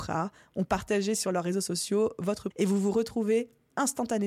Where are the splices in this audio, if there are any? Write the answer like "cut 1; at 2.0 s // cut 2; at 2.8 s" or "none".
cut 1; at 2.5 s